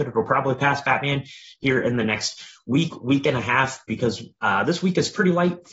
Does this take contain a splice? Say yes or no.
no